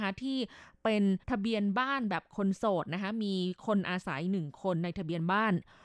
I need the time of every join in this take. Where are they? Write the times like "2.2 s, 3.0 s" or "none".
1.2 s